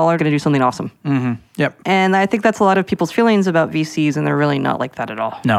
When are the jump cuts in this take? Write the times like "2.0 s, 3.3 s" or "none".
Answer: 1.5 s